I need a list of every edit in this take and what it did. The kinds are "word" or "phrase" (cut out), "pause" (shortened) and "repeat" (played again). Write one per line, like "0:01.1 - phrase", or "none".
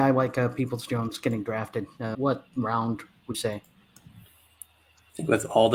0:02.1 - word
0:03.3 - word